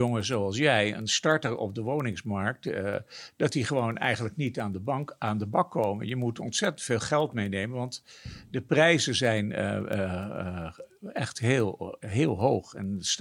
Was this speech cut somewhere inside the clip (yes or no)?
no